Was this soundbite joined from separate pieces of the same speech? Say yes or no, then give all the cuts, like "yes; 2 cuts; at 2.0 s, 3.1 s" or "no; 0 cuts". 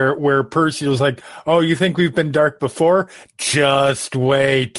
no; 0 cuts